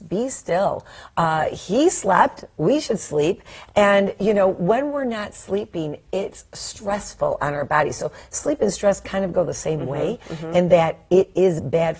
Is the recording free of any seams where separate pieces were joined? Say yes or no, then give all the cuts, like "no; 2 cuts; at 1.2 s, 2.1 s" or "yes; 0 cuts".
yes; 0 cuts